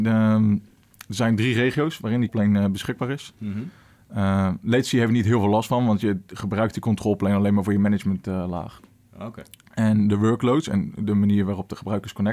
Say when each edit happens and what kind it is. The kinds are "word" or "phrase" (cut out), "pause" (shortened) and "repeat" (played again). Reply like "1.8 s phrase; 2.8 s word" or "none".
2.3 s word

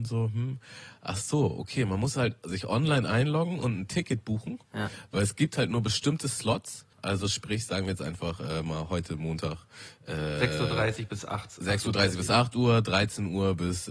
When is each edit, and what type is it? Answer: 6.9 s pause

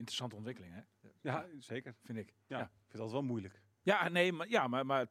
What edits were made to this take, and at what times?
3.7 s pause

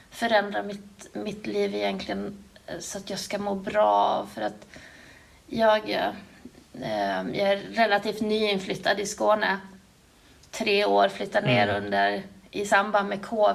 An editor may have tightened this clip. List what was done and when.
none

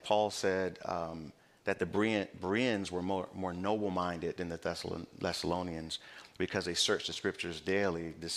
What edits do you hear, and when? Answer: none

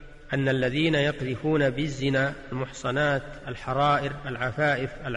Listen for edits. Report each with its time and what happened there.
none

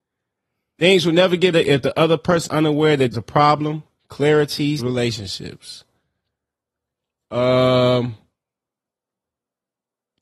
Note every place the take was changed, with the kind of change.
1.5 s word; 2.5 s word; 3.1 s word; 4.8 s word

